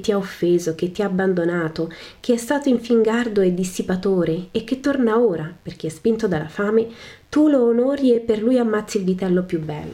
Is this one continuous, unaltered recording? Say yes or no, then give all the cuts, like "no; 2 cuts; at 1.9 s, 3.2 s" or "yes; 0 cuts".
yes; 0 cuts